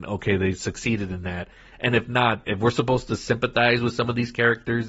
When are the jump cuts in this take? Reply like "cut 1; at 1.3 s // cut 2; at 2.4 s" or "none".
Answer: cut 1; at 2.4 s